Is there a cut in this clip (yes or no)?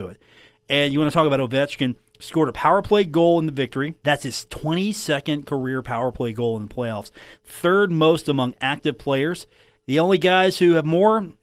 no